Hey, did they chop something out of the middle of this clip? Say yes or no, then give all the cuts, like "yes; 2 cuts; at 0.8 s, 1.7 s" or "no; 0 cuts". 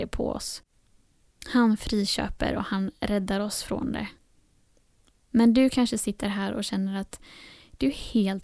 no; 0 cuts